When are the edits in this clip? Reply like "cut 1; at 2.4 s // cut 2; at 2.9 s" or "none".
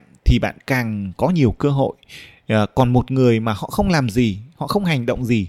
none